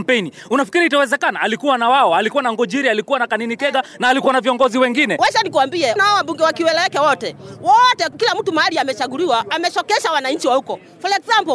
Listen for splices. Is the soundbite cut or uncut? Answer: cut